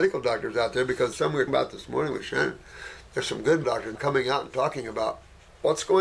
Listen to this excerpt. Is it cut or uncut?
cut